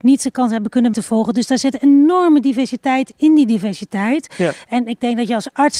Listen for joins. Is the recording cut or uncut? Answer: cut